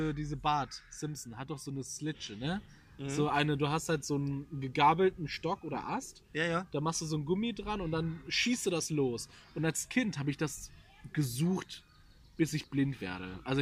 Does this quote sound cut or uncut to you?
uncut